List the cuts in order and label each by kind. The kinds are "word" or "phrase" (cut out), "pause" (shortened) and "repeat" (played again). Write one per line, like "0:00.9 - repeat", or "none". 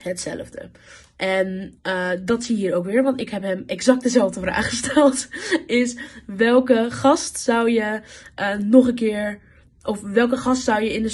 none